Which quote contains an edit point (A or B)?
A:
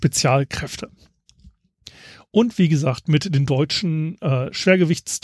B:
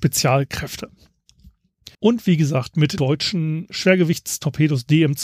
B